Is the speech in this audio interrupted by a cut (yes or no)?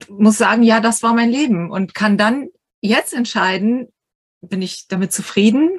no